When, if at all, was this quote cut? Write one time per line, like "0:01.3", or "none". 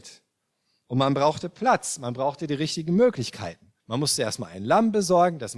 0:03.8